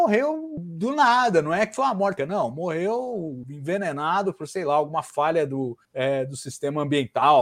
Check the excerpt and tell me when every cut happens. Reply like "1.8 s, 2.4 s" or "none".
2.2 s, 5.8 s